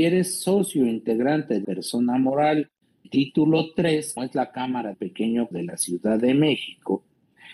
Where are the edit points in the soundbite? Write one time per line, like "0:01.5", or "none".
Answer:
0:01.6
0:03.0
0:04.2
0:04.9
0:05.5